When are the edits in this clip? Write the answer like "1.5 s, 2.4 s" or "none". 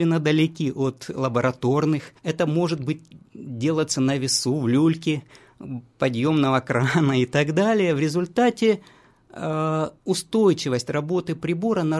2.2 s, 10.0 s